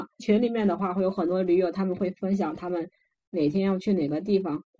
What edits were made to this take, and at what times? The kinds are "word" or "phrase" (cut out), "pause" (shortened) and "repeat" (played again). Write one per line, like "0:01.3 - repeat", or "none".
none